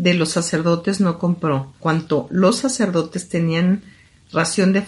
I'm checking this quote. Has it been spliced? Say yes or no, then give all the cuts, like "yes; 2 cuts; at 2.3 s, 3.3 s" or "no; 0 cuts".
yes; 1 cut; at 1.8 s